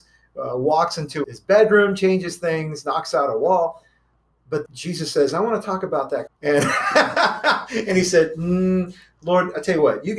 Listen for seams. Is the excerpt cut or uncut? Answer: cut